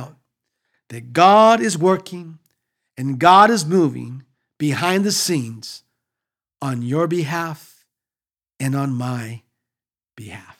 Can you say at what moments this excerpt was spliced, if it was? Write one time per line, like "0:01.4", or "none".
none